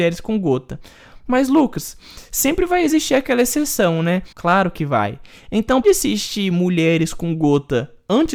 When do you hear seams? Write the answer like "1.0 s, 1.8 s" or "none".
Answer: 4.3 s, 5.8 s